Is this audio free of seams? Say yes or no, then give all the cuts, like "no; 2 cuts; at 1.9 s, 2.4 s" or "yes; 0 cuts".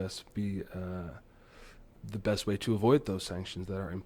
no; 1 cut; at 2.0 s